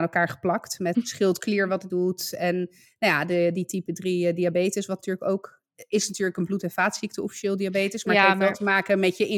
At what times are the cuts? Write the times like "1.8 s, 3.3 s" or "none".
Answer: 0.9 s, 1.9 s